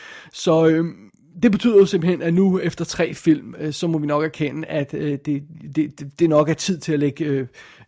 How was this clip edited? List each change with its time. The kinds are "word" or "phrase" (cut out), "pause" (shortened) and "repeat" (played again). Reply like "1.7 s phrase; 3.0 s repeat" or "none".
none